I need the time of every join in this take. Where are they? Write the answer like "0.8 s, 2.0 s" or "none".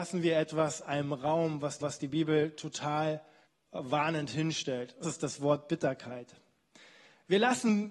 1.8 s, 3.5 s, 5.0 s